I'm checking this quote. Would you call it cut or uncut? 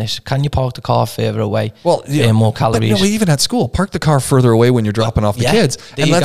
uncut